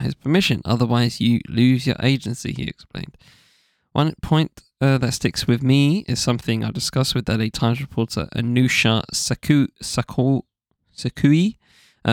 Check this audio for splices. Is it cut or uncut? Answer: uncut